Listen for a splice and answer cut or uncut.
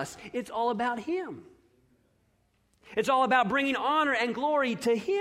uncut